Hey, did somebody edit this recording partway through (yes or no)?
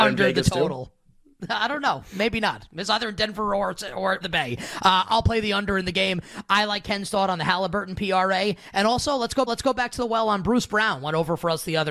yes